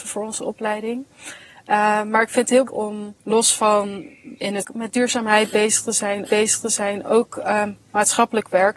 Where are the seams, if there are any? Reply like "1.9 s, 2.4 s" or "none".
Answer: 2.7 s, 3.2 s, 4.6 s, 6.3 s